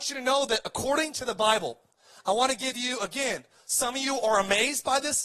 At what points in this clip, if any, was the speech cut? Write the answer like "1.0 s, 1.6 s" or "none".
none